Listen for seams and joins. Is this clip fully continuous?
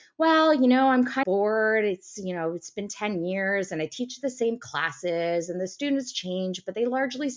no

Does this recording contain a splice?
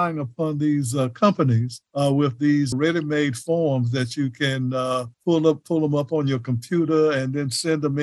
yes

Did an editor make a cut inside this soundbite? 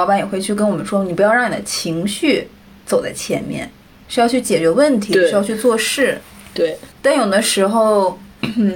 yes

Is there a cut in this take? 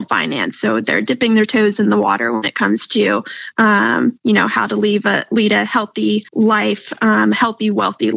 yes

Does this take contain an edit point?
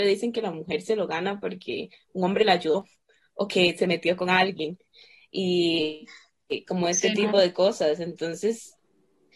no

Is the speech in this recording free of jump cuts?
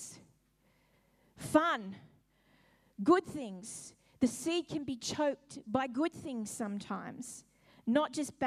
yes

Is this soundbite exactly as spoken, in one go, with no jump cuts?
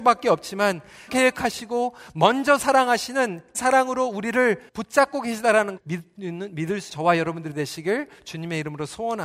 no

